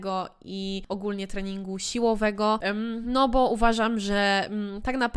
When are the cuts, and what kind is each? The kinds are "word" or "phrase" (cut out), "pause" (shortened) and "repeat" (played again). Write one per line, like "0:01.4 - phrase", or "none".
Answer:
none